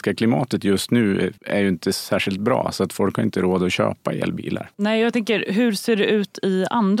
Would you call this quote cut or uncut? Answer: cut